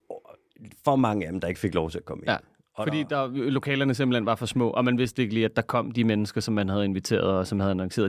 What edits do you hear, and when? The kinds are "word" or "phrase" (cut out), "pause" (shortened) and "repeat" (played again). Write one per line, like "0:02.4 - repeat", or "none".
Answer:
none